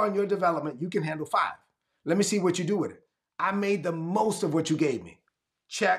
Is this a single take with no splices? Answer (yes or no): yes